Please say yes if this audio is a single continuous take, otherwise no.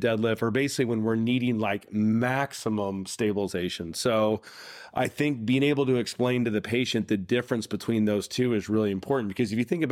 yes